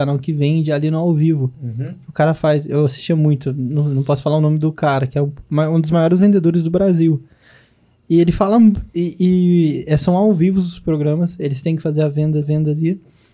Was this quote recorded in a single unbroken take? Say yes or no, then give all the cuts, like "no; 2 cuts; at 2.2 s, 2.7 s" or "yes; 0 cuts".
no; 1 cut; at 12.4 s